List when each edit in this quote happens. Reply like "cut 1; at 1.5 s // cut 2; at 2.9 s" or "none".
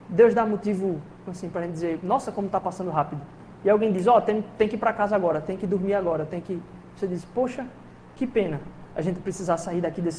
none